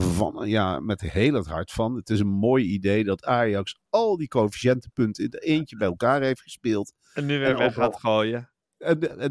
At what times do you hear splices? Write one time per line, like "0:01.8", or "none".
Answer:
none